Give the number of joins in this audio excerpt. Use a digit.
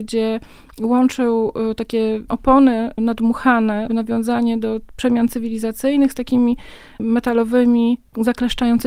0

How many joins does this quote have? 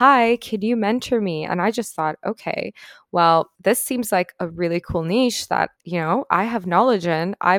2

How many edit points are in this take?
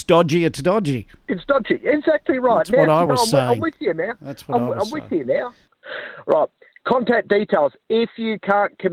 0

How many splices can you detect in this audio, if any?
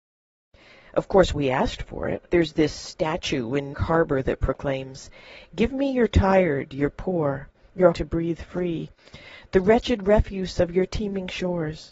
3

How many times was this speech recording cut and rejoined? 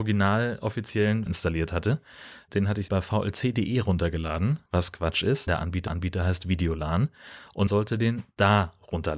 6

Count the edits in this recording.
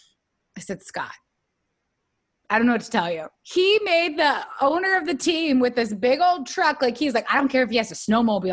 0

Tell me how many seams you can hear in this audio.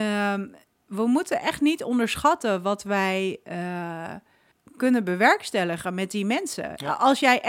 1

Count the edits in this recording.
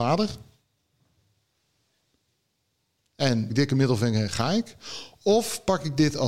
1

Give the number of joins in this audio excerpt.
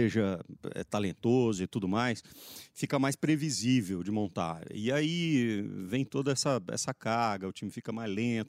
0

